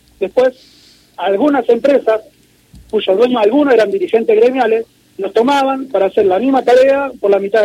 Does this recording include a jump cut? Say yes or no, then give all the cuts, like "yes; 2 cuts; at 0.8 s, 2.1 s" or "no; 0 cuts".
no; 0 cuts